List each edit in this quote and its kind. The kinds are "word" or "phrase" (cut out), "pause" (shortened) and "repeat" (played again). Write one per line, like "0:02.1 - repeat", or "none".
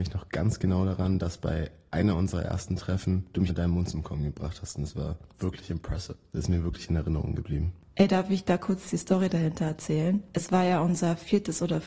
0:03.5 - word